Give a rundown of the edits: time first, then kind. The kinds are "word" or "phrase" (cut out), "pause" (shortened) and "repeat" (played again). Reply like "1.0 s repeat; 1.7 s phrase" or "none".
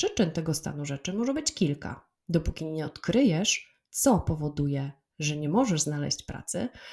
3.9 s pause